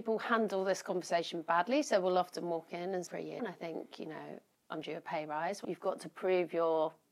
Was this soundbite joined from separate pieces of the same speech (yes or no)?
yes